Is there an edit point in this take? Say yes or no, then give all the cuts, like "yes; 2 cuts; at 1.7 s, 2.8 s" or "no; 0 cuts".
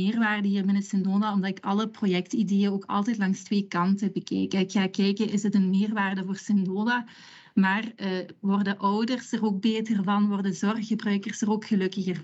no; 0 cuts